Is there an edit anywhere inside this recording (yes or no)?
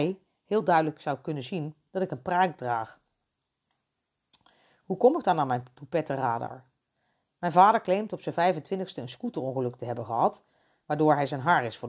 no